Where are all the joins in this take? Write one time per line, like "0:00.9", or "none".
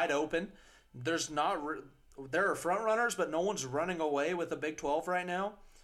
none